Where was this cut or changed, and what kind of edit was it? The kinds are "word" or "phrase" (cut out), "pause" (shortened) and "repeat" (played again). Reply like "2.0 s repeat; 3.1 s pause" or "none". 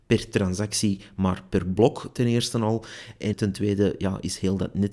3.3 s word